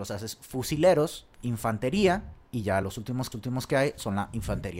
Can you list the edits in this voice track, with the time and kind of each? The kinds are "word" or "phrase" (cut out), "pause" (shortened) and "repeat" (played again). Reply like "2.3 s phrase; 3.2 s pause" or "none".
1.3 s pause; 2.8 s word; 3.3 s repeat